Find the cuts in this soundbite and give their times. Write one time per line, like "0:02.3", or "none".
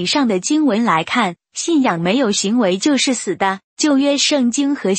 0:03.6